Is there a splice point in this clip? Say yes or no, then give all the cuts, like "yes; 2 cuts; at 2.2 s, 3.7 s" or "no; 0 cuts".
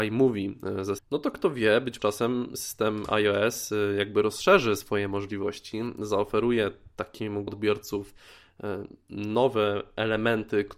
yes; 3 cuts; at 1.0 s, 2.0 s, 7.5 s